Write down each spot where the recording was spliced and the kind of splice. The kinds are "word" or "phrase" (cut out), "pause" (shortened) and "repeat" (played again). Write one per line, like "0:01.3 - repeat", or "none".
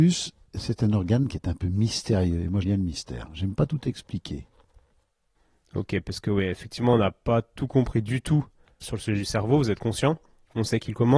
0:02.6 - word
0:08.8 - word

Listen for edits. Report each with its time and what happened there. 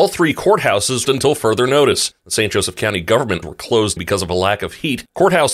0:01.0 - phrase
0:03.4 - word
0:04.0 - word

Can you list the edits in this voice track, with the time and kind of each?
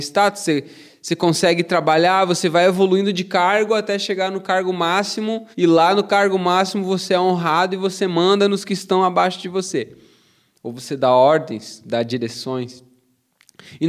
0:05.5 - pause

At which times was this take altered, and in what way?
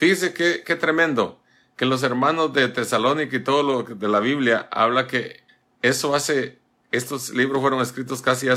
0:05.5 - pause

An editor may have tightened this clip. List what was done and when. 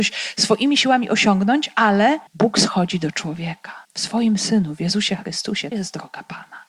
0:02.3 - pause
0:03.8 - pause
0:05.7 - word

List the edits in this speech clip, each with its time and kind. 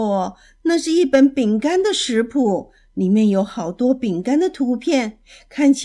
none

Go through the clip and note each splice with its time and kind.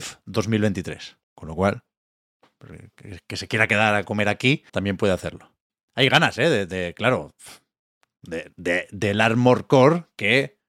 0:01.2 - pause
0:04.7 - pause
0:05.7 - pause

